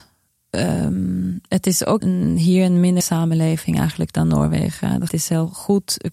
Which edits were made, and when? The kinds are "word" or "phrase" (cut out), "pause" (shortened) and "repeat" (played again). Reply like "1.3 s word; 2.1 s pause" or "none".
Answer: 2.0 s word; 3.0 s word; 5.1 s word